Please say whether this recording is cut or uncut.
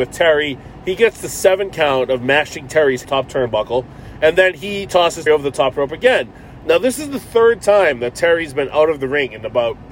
cut